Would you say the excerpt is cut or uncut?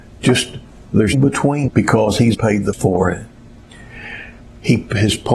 cut